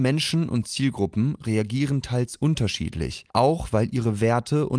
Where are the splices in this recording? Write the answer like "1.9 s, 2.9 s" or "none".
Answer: 3.3 s